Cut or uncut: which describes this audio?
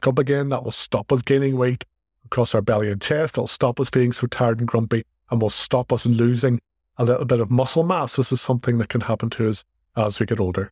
uncut